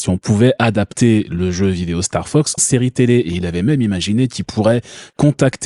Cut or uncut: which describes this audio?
cut